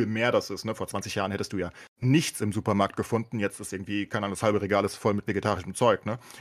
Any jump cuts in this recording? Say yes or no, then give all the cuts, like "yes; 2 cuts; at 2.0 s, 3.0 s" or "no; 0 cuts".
yes; 1 cut; at 1.9 s